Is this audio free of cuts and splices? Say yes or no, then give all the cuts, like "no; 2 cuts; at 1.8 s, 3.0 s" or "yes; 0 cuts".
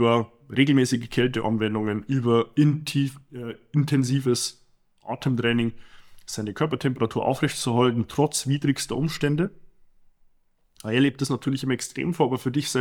yes; 0 cuts